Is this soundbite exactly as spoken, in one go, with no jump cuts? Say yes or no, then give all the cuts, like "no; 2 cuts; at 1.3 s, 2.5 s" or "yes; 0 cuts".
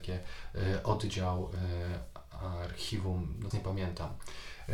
no; 1 cut; at 3.5 s